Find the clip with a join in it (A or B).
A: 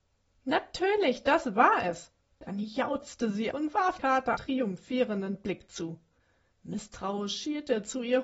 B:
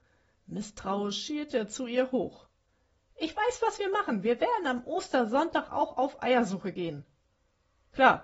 A